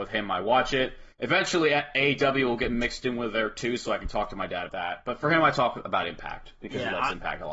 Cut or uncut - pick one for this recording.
cut